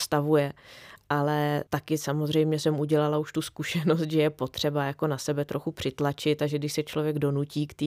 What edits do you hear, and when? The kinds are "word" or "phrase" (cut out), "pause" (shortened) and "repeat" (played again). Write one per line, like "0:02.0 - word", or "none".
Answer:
0:01.7 - pause